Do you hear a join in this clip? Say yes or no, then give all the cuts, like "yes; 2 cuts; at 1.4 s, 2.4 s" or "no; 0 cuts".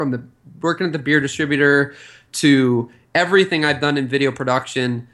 no; 0 cuts